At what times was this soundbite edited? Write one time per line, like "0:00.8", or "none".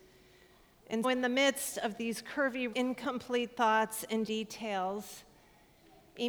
0:01.0
0:02.7
0:04.3